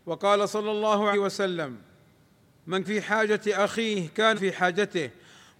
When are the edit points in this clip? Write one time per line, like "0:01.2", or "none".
0:01.1
0:02.8
0:04.3

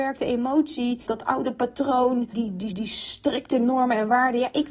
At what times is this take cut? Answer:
0:01.1
0:02.3
0:02.7

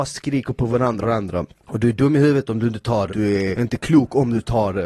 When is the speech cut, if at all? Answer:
0:01.0
0:03.1
0:03.5

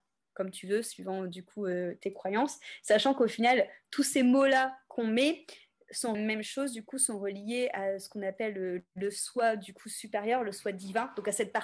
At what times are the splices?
0:06.1

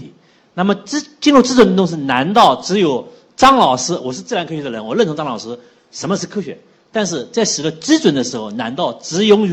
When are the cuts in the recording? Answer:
none

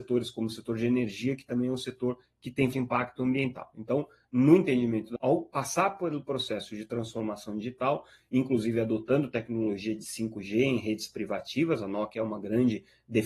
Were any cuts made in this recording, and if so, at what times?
0:02.7
0:05.2

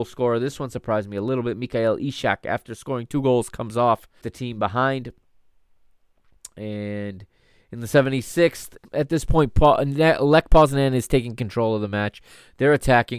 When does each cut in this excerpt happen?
0:04.2
0:08.8

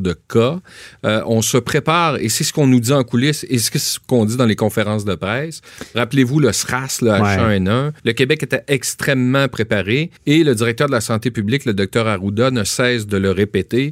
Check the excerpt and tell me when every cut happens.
0:08.0
0:10.2

